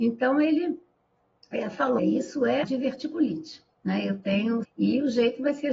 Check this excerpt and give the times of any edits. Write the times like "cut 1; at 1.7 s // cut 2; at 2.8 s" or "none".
cut 1; at 2.0 s // cut 2; at 2.6 s // cut 3; at 4.6 s